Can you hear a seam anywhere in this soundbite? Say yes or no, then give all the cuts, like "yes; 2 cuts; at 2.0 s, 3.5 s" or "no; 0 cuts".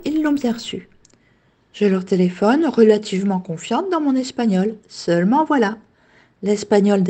no; 0 cuts